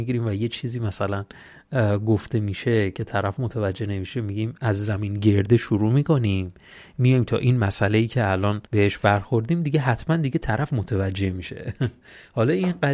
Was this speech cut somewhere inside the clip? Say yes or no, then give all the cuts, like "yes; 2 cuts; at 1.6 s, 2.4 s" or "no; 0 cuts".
yes; 1 cut; at 8.7 s